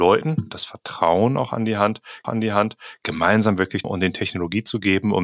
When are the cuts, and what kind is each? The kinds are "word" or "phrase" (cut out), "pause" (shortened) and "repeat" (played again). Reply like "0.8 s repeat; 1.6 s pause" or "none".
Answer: 2.2 s repeat; 3.8 s phrase